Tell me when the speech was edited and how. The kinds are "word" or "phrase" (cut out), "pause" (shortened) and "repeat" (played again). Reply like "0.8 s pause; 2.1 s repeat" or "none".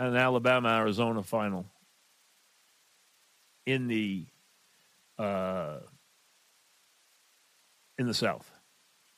none